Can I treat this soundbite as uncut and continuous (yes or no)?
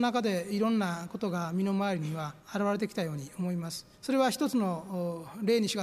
no